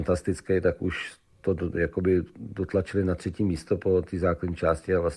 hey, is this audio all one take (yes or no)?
yes